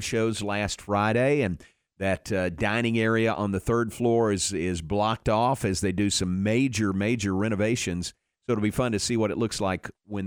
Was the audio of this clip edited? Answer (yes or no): no